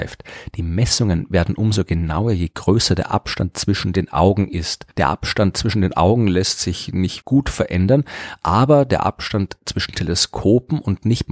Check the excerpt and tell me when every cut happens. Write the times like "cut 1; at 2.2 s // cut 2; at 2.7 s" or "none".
cut 1; at 7.2 s